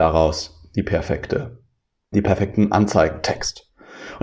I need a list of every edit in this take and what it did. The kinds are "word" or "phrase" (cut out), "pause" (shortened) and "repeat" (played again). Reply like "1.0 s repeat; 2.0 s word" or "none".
2.1 s word